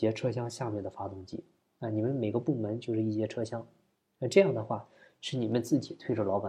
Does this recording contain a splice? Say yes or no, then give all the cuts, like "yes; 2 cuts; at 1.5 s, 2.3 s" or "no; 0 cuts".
no; 0 cuts